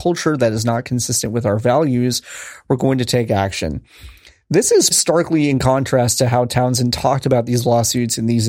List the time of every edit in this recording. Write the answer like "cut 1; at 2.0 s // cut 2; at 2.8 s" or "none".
cut 1; at 4.9 s